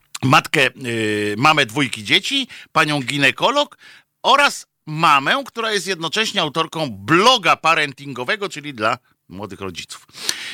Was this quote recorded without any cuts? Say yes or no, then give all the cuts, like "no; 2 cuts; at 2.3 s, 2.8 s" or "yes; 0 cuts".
yes; 0 cuts